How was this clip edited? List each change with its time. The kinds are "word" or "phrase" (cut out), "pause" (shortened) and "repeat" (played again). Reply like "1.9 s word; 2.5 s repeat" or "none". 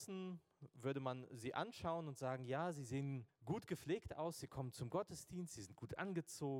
3.3 s pause